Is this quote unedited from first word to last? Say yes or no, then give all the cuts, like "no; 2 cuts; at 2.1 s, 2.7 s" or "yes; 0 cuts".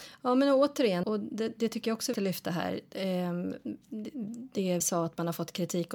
no; 3 cuts; at 1.0 s, 2.1 s, 4.8 s